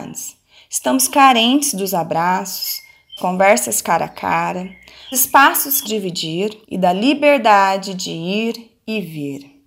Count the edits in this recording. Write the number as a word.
four